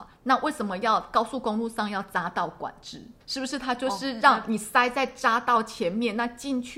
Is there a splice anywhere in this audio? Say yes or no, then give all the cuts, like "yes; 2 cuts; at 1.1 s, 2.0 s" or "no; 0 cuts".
yes; 1 cut; at 3.2 s